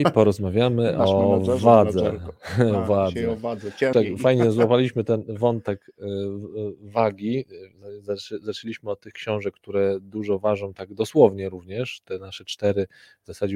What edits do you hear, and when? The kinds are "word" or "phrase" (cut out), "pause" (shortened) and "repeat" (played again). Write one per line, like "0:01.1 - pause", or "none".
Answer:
0:03.9 - word

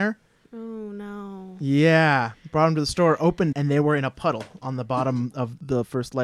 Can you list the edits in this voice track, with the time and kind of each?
0:03.5 - word

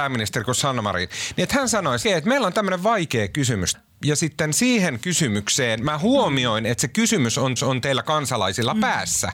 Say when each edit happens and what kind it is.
0:02.0 - phrase
0:03.7 - word
0:07.6 - repeat

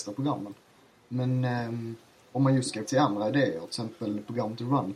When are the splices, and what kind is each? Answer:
0:02.8 - word

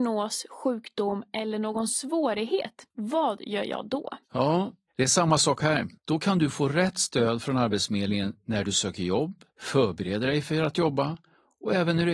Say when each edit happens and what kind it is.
0:02.9 - pause
0:04.2 - pause
0:06.0 - pause
0:09.5 - pause

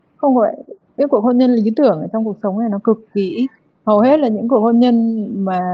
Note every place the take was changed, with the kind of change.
0:01.0 - word
0:02.8 - word

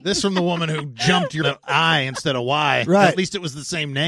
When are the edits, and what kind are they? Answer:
0:01.4 - phrase

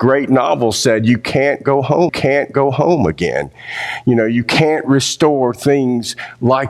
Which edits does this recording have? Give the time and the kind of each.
0:02.1 - repeat

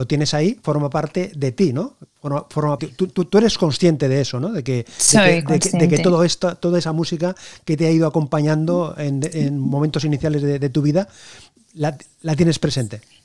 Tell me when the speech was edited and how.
0:02.8 - phrase

